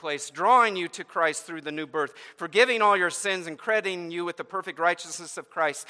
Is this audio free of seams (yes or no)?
yes